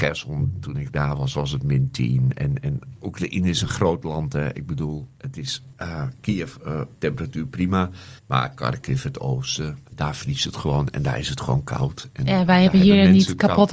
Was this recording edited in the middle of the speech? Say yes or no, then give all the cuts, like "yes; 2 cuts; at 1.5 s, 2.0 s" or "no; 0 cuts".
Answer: yes; 3 cuts; at 5.7 s, 8.2 s, 9.9 s